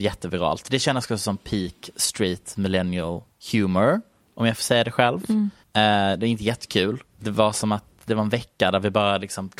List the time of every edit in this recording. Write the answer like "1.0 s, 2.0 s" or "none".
3.3 s, 5.6 s, 7.1 s